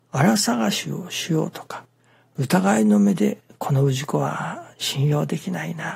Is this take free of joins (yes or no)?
yes